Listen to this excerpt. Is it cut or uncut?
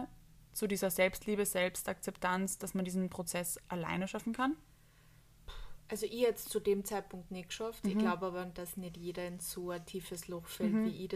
uncut